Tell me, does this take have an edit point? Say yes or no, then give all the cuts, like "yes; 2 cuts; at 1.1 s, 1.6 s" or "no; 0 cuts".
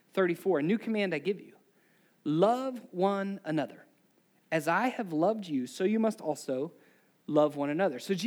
no; 0 cuts